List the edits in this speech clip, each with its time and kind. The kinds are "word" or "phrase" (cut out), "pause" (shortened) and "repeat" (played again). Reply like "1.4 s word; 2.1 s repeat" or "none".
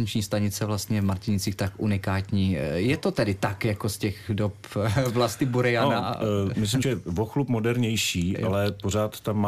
6.8 s phrase

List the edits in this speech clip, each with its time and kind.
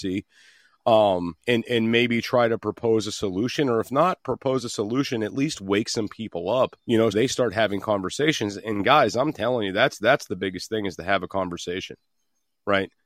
1.4 s pause; 6.8 s pause; 7.1 s word

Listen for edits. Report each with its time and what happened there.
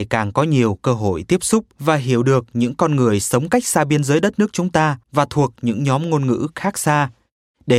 1.7 s pause; 5.0 s pause

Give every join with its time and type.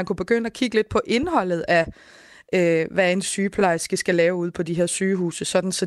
none

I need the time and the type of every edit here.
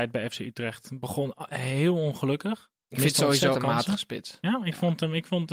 2.8 s pause; 3.5 s word

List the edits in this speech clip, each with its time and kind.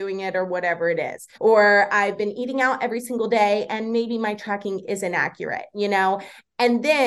1.3 s pause

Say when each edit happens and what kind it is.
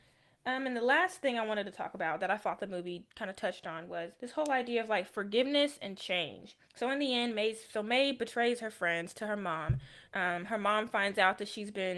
4.2 s pause; 6.6 s pause; 10.1 s pause

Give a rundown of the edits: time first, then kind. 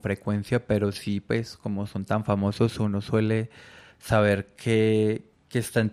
none

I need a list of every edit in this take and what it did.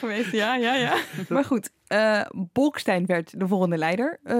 none

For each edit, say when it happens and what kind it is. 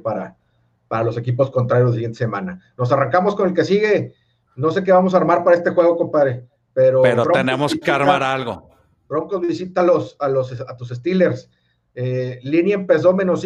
none

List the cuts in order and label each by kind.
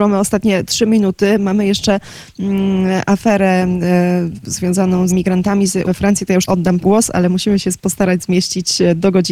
5.1 s word; 5.8 s word; 6.5 s word; 6.8 s word

